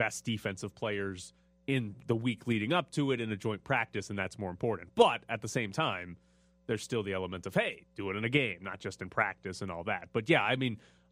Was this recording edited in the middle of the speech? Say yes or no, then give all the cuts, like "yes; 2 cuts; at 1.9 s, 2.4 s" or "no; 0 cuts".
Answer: no; 0 cuts